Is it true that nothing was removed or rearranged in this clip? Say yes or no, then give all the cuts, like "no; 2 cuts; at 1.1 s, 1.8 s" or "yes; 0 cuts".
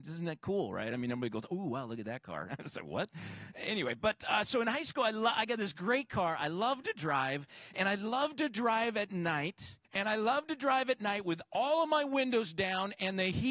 no; 1 cut; at 9.8 s